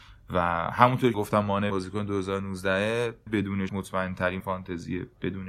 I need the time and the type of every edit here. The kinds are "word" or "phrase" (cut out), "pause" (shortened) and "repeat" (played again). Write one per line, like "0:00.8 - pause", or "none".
0:01.1 - word
0:01.7 - word
0:03.3 - word
0:03.7 - word
0:04.4 - word